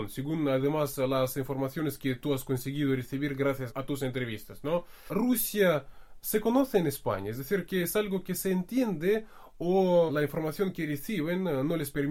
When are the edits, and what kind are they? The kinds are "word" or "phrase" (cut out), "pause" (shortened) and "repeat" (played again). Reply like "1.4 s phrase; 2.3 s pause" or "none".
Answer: none